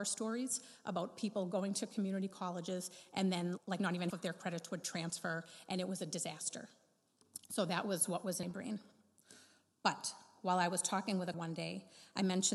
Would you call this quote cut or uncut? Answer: cut